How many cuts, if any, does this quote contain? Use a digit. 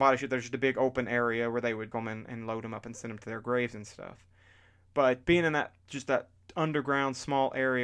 2